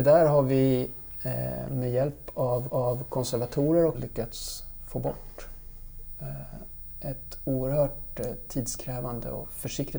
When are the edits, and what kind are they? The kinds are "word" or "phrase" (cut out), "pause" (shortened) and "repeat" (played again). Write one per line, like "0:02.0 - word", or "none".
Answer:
0:02.7 - repeat
0:03.9 - phrase